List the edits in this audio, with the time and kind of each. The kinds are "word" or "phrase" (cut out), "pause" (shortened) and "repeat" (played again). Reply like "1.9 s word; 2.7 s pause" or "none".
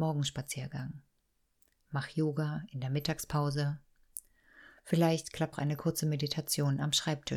5.5 s word